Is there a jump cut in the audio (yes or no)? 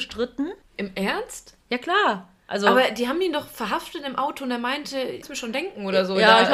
yes